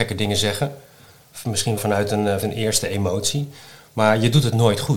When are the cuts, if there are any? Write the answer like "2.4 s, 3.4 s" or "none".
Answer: 1.8 s, 2.4 s